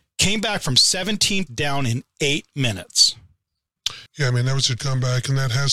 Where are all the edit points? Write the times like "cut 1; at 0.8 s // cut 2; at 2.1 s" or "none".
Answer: cut 1; at 1.5 s // cut 2; at 4.1 s // cut 3; at 4.8 s